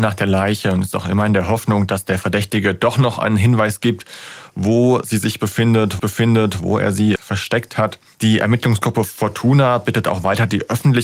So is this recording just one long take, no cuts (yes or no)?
no